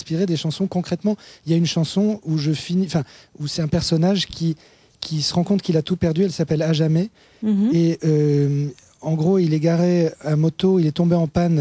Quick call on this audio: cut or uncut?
uncut